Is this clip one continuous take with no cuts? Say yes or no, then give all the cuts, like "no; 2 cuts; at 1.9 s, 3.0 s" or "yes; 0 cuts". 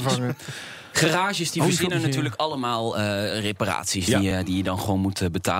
yes; 0 cuts